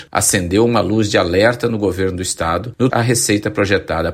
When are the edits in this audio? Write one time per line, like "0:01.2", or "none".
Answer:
0:02.9